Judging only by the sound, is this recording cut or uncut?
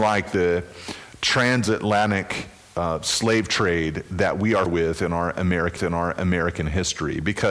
cut